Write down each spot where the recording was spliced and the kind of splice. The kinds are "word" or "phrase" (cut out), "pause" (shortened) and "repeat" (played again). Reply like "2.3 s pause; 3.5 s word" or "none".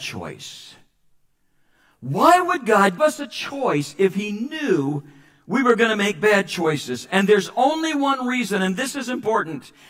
3.0 s word